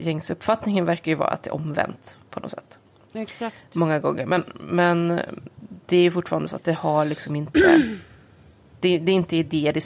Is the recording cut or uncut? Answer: uncut